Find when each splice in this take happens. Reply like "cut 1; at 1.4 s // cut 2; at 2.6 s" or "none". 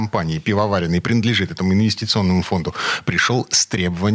none